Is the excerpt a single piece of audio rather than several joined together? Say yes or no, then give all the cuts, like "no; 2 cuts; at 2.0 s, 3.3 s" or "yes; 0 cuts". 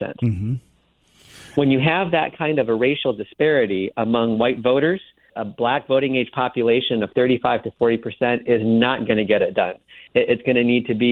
no; 1 cut; at 5.3 s